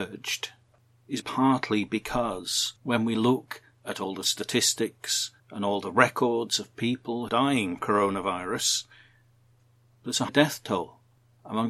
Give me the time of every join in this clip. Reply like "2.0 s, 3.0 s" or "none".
1.2 s, 2.8 s, 5.4 s, 7.3 s, 7.8 s, 10.3 s